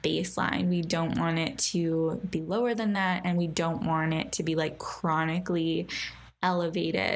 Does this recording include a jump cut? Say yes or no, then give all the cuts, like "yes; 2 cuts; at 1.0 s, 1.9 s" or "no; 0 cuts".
no; 0 cuts